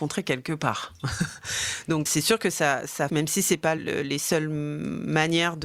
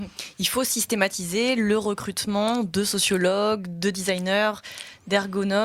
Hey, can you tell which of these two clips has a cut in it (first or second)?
first